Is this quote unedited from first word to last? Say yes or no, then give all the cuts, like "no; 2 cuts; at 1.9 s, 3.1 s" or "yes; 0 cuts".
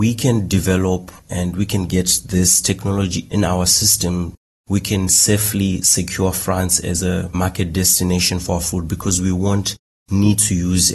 no; 1 cut; at 1.2 s